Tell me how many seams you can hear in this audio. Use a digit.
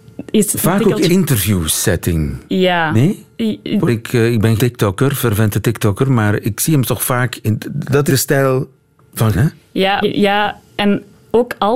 7